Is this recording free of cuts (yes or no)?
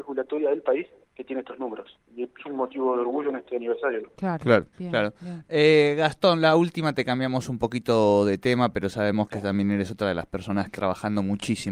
no